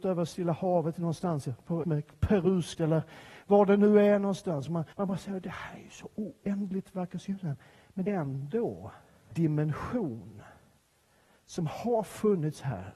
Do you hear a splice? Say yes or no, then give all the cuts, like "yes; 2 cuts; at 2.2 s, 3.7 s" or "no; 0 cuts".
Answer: yes; 5 cuts; at 1.8 s, 2.7 s, 4.9 s, 8.1 s, 9.3 s